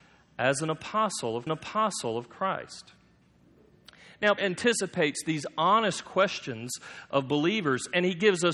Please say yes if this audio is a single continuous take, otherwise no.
no